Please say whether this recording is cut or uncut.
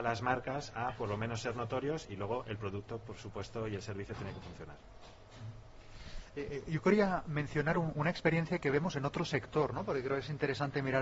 uncut